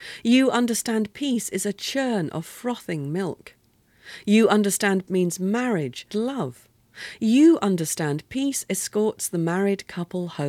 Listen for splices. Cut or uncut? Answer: cut